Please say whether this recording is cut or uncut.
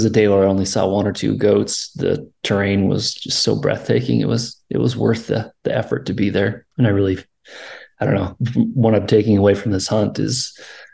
cut